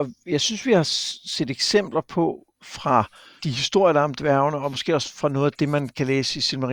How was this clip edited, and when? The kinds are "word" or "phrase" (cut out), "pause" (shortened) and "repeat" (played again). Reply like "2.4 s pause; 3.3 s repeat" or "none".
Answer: 3.4 s word